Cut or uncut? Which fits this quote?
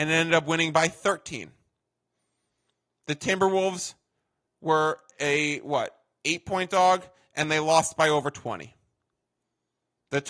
uncut